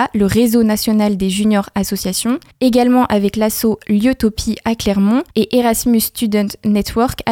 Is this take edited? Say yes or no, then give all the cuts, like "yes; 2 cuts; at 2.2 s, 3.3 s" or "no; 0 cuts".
yes; 2 cuts; at 2.5 s, 5.3 s